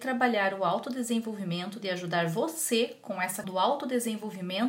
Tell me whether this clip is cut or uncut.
cut